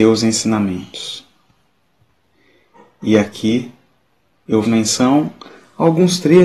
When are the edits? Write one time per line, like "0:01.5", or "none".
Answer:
0:04.6